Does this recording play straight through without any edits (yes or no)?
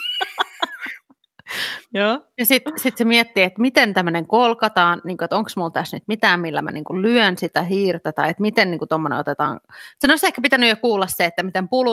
yes